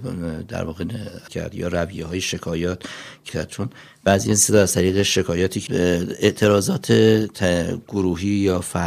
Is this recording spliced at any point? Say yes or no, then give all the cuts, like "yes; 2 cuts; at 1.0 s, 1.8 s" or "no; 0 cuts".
yes; 3 cuts; at 1.3 s, 3.3 s, 5.7 s